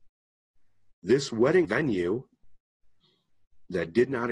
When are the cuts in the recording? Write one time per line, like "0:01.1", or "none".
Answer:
0:01.6